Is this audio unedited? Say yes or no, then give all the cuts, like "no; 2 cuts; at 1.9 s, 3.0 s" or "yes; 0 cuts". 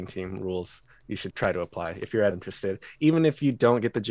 no; 2 cuts; at 1.3 s, 2.3 s